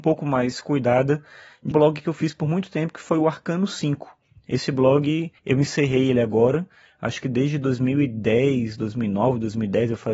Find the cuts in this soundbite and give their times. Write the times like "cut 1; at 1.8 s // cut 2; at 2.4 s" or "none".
cut 1; at 1.7 s // cut 2; at 5.4 s